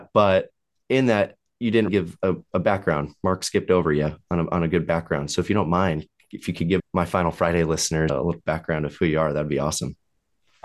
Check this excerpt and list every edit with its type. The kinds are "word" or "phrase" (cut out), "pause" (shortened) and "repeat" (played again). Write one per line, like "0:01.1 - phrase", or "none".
0:01.9 - word
0:06.8 - word
0:08.1 - word